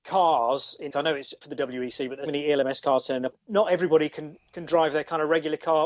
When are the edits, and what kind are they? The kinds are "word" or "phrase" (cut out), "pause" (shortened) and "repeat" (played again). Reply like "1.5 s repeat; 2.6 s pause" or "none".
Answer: 0.9 s word; 1.4 s phrase; 2.3 s word; 3.3 s phrase